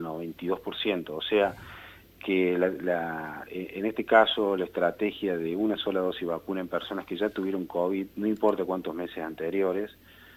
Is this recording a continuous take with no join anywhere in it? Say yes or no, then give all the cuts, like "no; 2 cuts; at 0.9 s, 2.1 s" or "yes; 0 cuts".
yes; 0 cuts